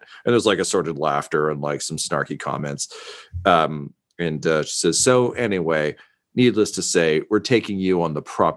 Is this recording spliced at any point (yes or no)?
no